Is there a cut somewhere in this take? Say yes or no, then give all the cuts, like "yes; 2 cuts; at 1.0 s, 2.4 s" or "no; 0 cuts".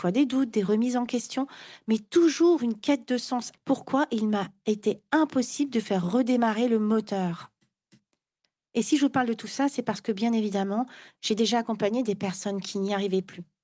yes; 1 cut; at 3.5 s